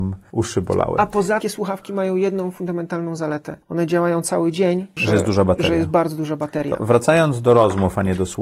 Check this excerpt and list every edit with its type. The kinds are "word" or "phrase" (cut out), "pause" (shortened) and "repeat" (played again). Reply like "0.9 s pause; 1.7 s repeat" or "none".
1.4 s phrase; 3.6 s pause; 5.0 s word